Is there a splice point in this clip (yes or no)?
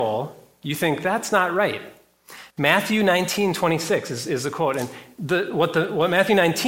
yes